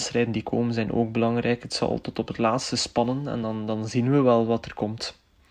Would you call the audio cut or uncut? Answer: uncut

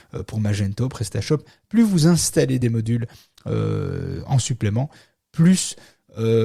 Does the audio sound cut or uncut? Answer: uncut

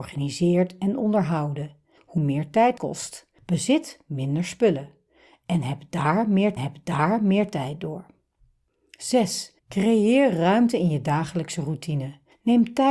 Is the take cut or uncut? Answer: cut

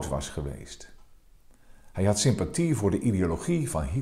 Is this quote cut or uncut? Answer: uncut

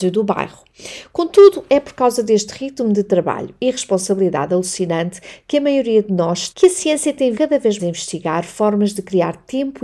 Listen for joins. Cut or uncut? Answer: cut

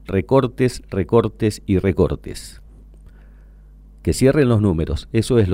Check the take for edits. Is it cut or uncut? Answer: uncut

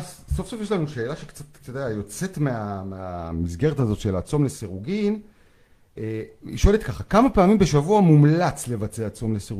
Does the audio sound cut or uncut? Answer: uncut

